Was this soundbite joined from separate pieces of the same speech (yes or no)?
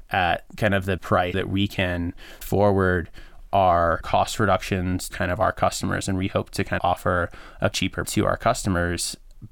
yes